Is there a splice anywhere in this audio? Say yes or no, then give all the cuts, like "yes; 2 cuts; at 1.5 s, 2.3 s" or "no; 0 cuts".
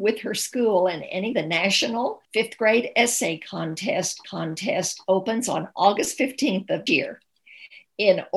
yes; 4 cuts; at 1.3 s, 2.2 s, 4.2 s, 6.9 s